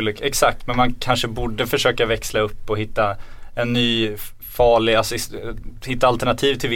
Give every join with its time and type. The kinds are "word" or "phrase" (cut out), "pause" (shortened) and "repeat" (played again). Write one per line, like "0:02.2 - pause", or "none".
none